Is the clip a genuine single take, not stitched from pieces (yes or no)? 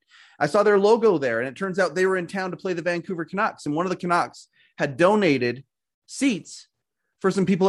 yes